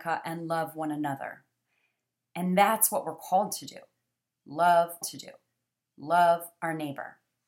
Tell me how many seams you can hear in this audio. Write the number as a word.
one